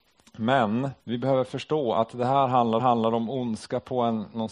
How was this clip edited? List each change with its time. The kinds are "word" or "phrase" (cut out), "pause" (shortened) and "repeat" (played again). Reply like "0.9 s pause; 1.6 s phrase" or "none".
1.0 s pause; 2.8 s repeat